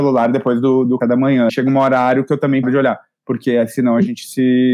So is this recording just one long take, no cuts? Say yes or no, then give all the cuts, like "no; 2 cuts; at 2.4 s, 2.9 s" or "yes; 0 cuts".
no; 3 cuts; at 1.0 s, 1.5 s, 2.6 s